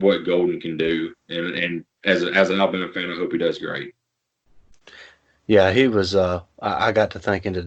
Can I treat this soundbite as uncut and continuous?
yes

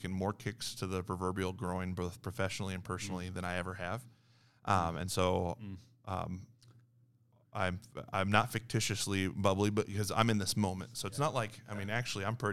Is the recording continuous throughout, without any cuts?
yes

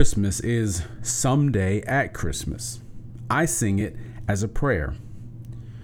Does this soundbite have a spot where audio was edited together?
no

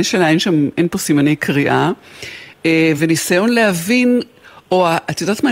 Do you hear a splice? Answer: no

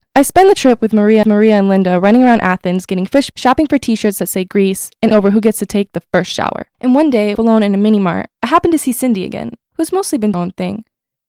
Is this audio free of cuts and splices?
no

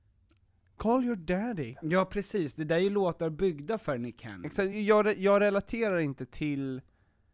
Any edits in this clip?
no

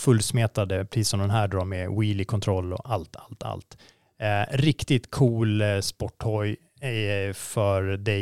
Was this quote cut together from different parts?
no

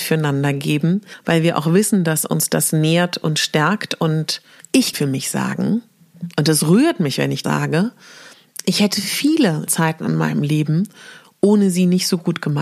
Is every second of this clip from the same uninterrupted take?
no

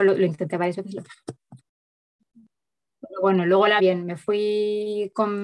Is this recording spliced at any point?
yes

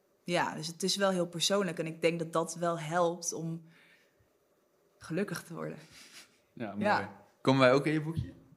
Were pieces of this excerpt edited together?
no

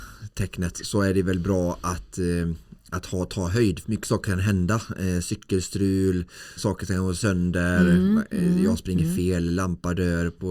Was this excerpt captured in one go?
no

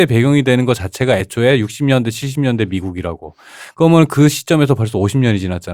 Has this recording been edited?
no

